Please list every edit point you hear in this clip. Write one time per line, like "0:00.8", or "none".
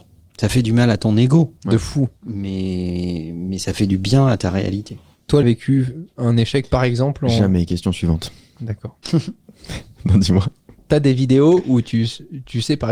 0:01.6
0:02.2
0:05.4
0:09.0